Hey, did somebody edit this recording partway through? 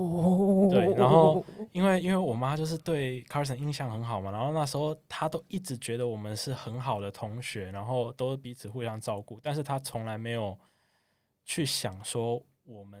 no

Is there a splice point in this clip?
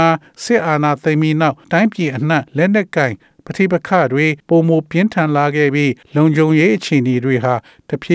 yes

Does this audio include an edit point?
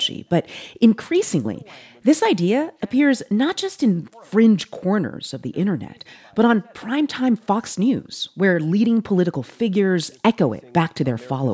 no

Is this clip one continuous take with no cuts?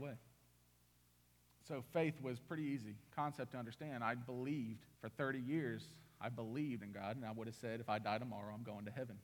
no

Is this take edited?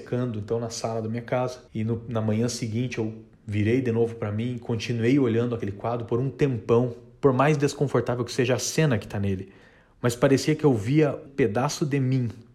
yes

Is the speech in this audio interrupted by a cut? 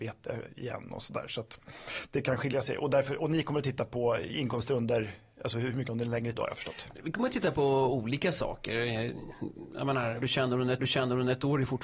yes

